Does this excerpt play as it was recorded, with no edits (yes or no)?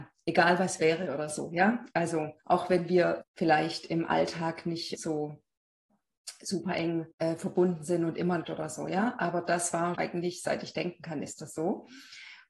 no